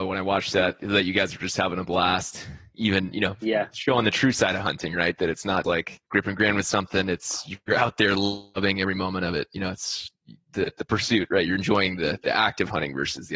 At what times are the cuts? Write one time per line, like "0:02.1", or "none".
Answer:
0:05.6
0:06.1